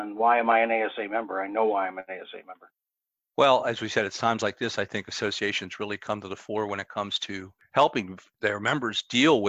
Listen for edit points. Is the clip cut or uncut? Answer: uncut